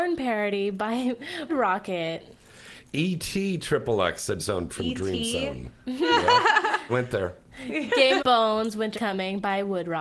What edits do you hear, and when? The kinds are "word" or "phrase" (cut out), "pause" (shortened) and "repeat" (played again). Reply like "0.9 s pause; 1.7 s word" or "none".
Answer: 1.5 s word; 4.4 s word; 4.7 s word; 6.9 s word; 8.2 s word; 8.9 s word